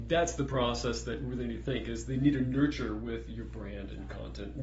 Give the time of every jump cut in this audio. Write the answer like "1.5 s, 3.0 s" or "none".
none